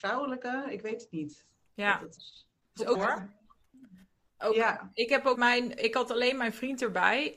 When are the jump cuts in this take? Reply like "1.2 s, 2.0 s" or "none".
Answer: 2.2 s, 2.9 s, 5.3 s, 5.8 s